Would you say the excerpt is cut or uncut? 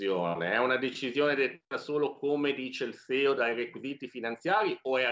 uncut